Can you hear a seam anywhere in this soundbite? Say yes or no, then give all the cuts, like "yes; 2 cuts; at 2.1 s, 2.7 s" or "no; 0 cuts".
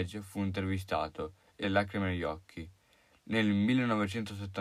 yes; 1 cut; at 1.6 s